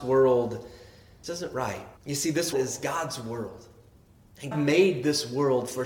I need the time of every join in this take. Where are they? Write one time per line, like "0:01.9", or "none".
0:01.2
0:02.0
0:02.5
0:04.5